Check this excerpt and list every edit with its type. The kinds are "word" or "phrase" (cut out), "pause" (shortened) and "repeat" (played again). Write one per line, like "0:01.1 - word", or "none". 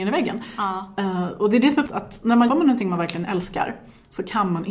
0:01.9 - word
0:02.5 - word